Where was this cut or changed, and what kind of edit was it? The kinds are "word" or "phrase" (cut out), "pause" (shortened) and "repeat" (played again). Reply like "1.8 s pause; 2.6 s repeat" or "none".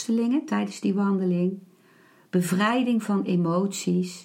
none